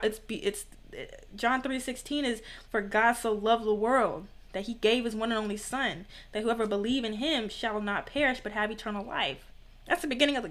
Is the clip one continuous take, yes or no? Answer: no